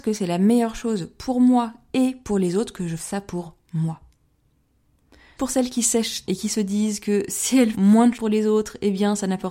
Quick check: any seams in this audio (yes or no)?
yes